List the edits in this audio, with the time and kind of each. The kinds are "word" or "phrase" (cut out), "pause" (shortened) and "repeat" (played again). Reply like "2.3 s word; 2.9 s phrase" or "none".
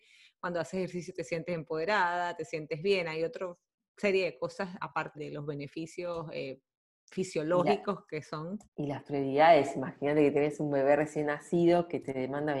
5.1 s word; 8.6 s pause